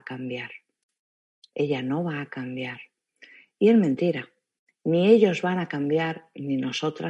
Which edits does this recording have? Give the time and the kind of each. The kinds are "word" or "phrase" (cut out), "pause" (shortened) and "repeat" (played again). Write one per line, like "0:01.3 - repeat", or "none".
none